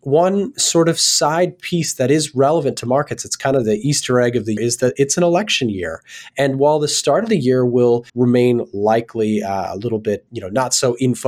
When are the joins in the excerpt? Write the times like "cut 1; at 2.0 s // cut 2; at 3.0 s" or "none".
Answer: cut 1; at 4.6 s // cut 2; at 8.1 s // cut 3; at 10.3 s

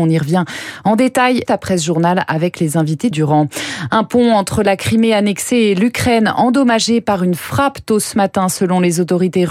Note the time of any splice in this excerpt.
cut 1; at 1.4 s // cut 2; at 3.1 s

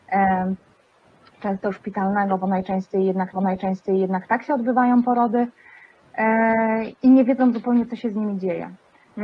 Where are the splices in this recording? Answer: cut 1; at 3.3 s // cut 2; at 7.0 s

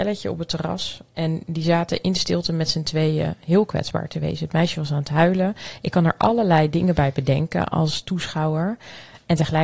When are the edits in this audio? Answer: cut 1; at 1.1 s

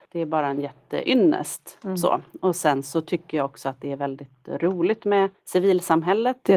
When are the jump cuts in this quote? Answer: cut 1; at 5.4 s

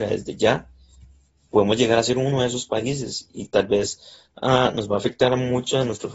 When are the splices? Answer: none

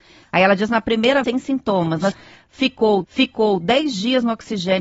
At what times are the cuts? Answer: cut 1; at 1.2 s // cut 2; at 2.1 s // cut 3; at 3.0 s

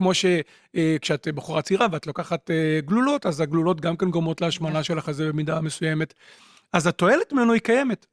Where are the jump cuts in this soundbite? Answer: none

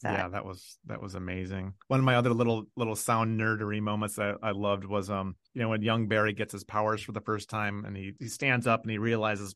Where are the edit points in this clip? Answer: cut 1; at 1.8 s // cut 2; at 5.5 s

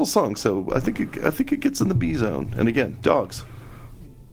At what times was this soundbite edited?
none

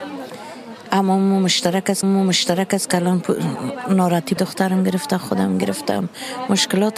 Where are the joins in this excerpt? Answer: cut 1; at 2.0 s // cut 2; at 4.4 s

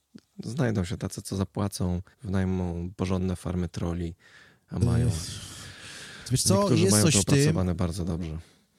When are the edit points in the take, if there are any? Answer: cut 1; at 2.1 s

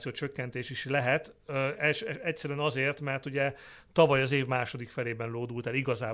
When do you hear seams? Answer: none

